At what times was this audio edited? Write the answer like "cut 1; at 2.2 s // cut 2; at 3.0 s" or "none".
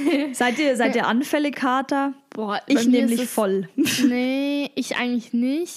cut 1; at 1.5 s